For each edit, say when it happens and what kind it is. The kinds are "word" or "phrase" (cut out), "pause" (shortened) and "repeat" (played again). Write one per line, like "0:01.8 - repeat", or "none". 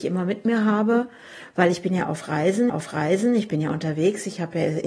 0:02.7 - repeat